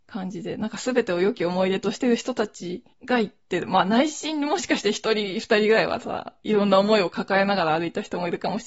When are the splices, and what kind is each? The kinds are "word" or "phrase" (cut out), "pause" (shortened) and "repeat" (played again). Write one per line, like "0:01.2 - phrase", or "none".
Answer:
0:02.9 - pause